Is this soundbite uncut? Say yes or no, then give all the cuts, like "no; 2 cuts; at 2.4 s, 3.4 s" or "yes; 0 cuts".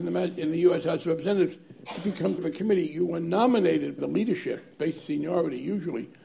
no; 3 cuts; at 2.4 s, 4.0 s, 5.0 s